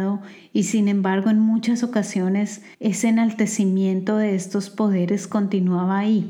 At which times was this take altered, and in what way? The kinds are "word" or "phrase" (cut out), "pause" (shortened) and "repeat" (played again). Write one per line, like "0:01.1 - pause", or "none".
0:02.7 - pause